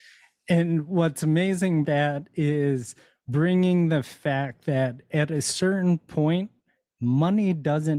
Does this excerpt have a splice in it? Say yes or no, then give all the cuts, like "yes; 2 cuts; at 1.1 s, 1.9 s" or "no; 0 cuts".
yes; 1 cut; at 1.8 s